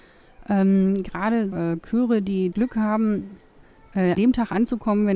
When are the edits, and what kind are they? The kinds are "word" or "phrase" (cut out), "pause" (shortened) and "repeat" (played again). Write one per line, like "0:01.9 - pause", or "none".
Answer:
0:01.5 - word
0:02.5 - word
0:04.2 - word